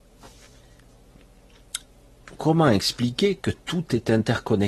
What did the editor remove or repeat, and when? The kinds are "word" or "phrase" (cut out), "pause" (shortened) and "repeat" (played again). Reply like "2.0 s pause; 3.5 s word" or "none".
none